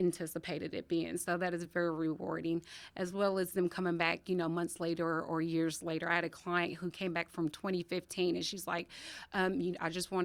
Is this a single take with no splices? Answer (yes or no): yes